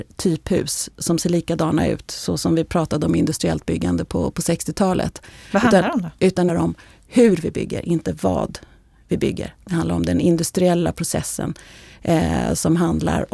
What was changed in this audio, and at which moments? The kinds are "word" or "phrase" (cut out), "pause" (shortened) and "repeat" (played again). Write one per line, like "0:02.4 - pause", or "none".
0:06.5 - phrase